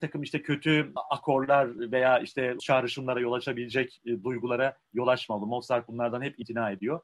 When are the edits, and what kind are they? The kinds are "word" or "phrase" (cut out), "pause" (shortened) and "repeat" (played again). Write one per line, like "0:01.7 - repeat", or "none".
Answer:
0:02.6 - word